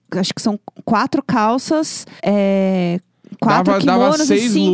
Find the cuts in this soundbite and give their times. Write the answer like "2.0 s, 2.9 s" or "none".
2.2 s